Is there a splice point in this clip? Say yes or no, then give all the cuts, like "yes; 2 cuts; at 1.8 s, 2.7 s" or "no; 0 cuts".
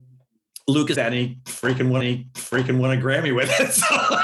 yes; 2 cuts; at 0.9 s, 2.0 s